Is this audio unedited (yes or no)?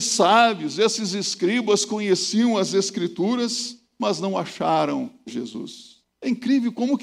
no